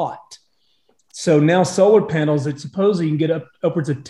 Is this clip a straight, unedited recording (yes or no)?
yes